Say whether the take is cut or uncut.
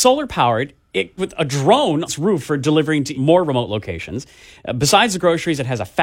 cut